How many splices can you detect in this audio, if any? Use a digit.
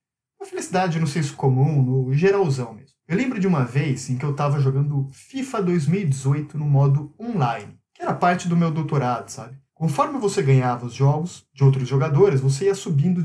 3